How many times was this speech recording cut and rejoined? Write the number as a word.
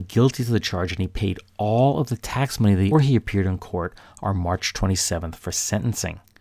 one